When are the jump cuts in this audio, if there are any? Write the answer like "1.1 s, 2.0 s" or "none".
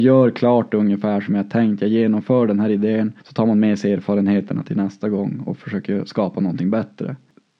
3.2 s

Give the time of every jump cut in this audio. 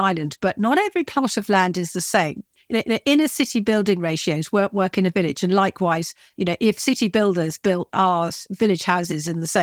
2.8 s

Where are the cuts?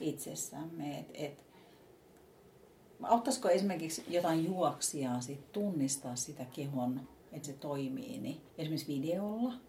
7.4 s, 8.5 s

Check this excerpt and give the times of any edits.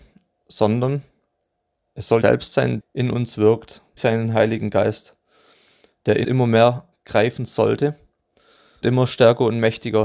2.2 s, 2.8 s, 4.0 s, 6.2 s, 6.9 s, 8.8 s

